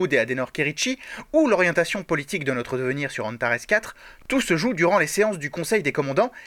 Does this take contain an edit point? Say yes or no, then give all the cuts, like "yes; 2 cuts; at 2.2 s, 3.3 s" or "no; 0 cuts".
no; 0 cuts